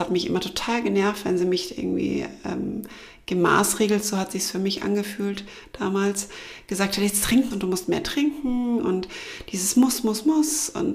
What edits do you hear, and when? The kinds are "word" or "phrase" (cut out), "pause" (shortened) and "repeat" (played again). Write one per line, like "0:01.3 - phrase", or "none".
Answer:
0:07.5 - phrase